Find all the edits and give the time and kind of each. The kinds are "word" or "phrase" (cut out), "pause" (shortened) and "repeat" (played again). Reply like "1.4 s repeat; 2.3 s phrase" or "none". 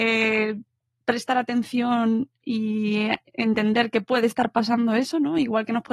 none